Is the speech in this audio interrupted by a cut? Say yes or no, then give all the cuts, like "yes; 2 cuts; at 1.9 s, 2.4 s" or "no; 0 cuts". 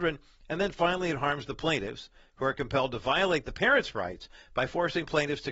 no; 0 cuts